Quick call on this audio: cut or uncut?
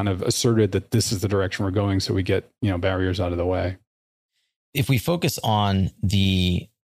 uncut